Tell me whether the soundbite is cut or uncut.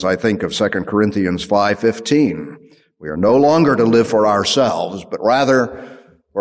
uncut